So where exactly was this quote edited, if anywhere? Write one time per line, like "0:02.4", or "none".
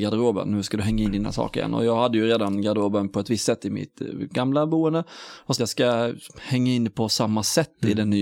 0:05.6